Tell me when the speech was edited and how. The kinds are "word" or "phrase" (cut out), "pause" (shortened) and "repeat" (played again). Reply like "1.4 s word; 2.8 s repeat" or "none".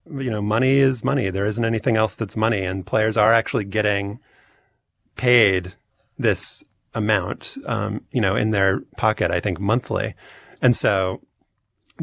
none